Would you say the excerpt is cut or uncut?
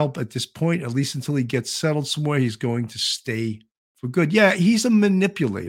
uncut